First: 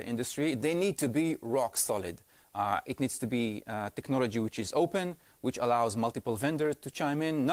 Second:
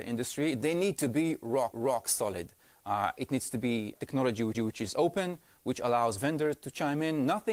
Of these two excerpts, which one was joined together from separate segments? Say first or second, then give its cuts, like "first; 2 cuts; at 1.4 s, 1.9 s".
second; 4 cuts; at 1.7 s, 4.0 s, 4.5 s, 6.2 s